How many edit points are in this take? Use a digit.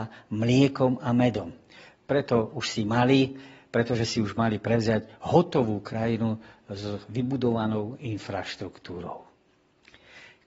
0